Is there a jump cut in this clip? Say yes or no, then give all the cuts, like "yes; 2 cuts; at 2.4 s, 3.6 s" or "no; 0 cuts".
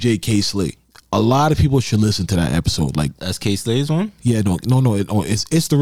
no; 0 cuts